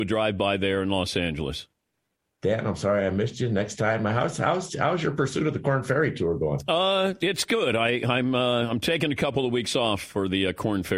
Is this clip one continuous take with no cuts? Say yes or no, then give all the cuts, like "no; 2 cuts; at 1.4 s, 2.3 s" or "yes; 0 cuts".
yes; 0 cuts